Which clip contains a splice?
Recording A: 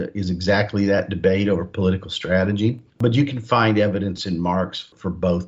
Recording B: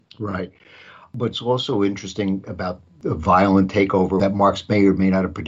A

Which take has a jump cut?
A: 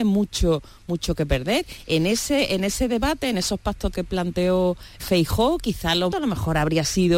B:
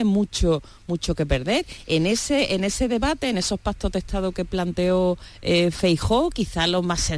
A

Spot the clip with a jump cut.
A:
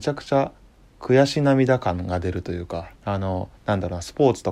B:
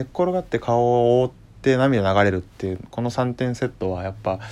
A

